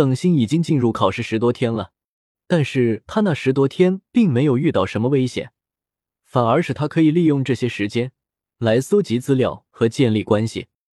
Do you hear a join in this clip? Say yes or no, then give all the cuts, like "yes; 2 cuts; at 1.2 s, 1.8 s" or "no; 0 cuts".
no; 0 cuts